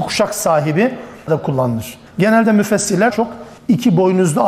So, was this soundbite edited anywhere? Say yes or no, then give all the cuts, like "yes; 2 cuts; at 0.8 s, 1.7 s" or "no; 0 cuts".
yes; 4 cuts; at 1.3 s, 2.1 s, 3.1 s, 3.6 s